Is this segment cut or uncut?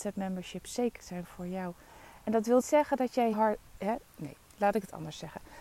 cut